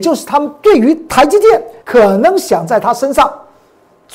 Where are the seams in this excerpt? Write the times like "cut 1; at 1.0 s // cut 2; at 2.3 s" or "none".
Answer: cut 1; at 1.8 s